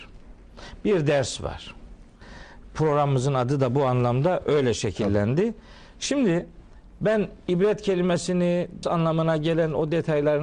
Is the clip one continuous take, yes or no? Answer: no